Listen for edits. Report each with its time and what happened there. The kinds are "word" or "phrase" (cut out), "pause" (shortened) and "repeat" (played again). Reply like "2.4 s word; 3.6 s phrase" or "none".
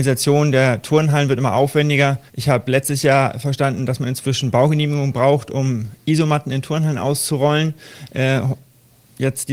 2.3 s pause